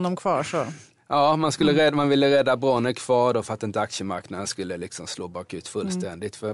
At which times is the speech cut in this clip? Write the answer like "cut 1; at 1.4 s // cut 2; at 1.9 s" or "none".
none